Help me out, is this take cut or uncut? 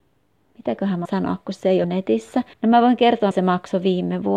cut